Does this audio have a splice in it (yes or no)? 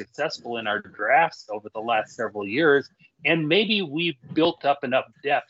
no